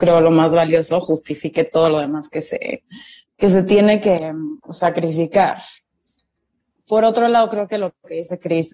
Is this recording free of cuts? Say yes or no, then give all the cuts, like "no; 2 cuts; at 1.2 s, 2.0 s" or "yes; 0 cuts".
no; 2 cuts; at 3.2 s, 4.6 s